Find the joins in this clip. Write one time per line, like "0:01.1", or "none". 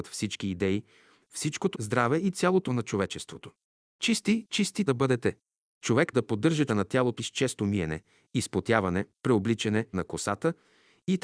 0:01.7
0:02.7
0:04.9
0:06.1
0:06.7
0:07.2
0:09.1
0:09.9